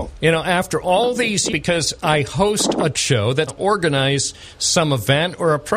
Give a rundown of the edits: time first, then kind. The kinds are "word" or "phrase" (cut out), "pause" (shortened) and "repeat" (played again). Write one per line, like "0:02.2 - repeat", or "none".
0:01.5 - phrase
0:02.9 - word
0:03.5 - phrase